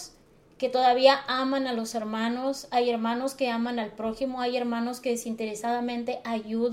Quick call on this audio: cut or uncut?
uncut